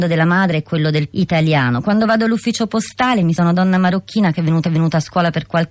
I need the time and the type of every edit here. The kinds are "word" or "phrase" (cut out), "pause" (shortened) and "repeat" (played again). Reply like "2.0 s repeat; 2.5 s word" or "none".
1.1 s word; 3.4 s word; 4.6 s repeat